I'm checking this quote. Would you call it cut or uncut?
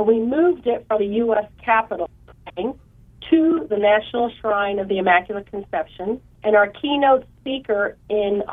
cut